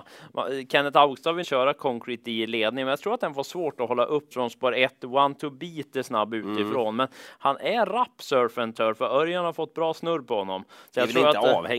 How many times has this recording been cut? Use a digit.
2